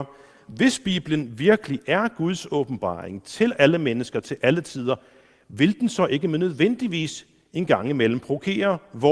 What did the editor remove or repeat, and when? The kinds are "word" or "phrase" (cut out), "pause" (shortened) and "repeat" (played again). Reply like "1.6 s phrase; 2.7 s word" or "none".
none